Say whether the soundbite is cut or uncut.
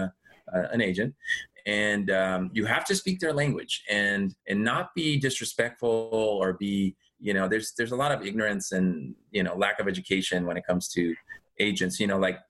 cut